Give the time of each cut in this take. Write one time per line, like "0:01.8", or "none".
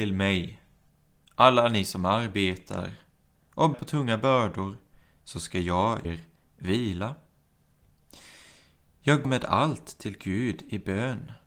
0:03.7
0:06.0
0:09.2